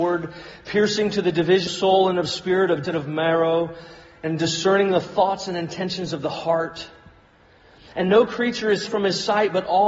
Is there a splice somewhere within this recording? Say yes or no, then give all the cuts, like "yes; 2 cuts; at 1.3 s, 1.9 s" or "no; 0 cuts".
yes; 3 cuts; at 1.7 s, 2.8 s, 8.9 s